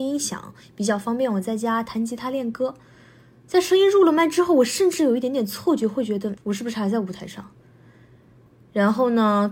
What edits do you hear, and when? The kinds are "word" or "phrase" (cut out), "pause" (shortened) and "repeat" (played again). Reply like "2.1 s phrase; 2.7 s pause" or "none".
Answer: 6.4 s word